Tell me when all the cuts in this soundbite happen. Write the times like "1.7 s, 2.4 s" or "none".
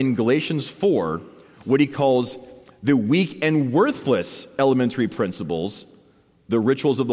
none